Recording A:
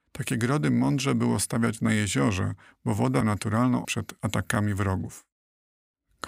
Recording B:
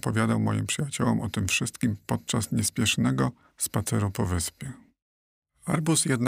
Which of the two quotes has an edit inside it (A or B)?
A